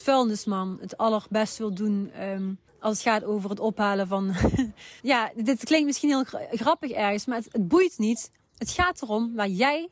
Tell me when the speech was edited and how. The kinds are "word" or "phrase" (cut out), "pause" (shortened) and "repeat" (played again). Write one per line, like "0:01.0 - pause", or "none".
0:02.7 - pause
0:05.0 - pause